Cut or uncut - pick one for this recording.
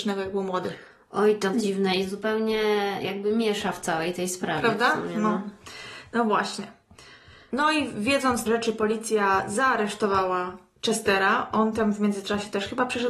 cut